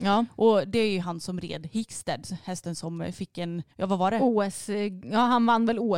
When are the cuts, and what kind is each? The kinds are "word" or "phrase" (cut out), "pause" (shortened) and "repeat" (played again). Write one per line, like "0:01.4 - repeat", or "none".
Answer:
0:03.7 - pause